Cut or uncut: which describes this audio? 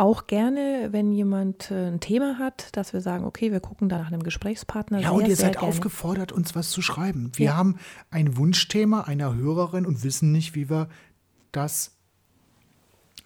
cut